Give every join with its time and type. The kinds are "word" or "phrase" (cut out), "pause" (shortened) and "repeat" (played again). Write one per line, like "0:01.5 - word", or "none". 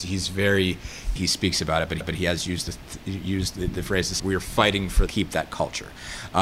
0:01.2 - phrase
0:02.0 - repeat
0:04.2 - word
0:05.1 - word